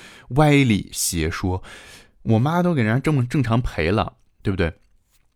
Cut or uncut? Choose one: uncut